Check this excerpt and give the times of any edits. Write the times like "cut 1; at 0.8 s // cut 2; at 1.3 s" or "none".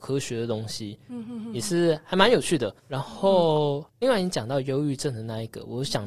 cut 1; at 2.8 s // cut 2; at 3.9 s